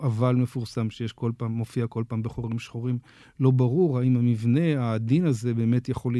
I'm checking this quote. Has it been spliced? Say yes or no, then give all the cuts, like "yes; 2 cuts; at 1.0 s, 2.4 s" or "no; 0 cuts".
no; 0 cuts